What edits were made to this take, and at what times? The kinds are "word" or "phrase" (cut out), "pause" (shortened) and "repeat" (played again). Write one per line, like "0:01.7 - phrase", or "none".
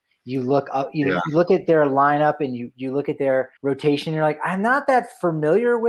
0:03.6 - pause